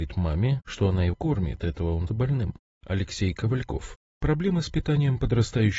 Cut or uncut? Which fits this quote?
cut